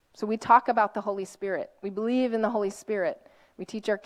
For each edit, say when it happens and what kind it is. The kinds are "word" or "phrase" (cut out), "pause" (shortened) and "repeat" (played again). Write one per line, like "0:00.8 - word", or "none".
none